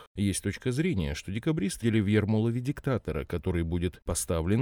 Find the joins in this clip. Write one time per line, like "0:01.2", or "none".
0:01.8